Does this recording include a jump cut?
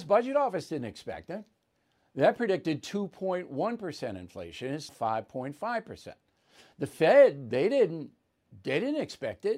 yes; 1 cut; at 4.9 s

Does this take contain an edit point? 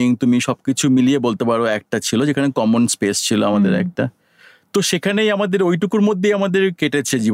no; 0 cuts

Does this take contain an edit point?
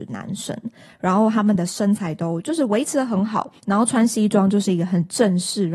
yes; 1 cut; at 3.6 s

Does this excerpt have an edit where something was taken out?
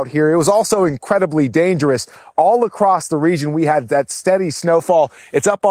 no; 0 cuts

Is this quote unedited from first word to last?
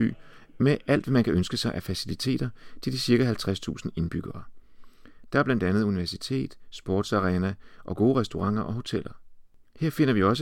yes; 0 cuts

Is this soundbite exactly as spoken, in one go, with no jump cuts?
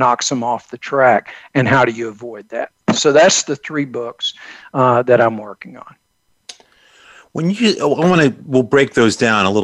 yes; 0 cuts

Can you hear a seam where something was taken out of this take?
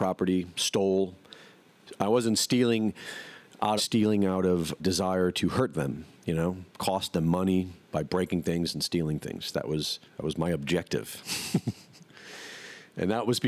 yes; 6 cuts; at 3.8 s, 4.8 s, 6.2 s, 6.7 s, 7.8 s, 10.1 s

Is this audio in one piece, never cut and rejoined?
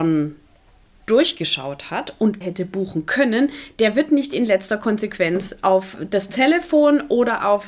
no; 1 cut; at 2.4 s

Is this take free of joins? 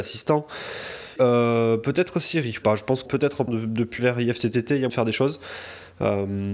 no; 6 cuts; at 1.2 s, 2.6 s, 3.1 s, 3.5 s, 4.0 s, 4.9 s

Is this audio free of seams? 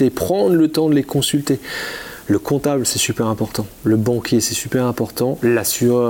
yes; 0 cuts

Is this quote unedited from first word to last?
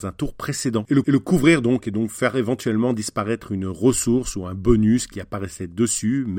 no; 1 cut; at 1.0 s

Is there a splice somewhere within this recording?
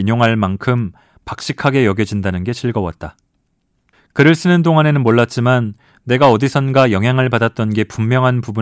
no; 0 cuts

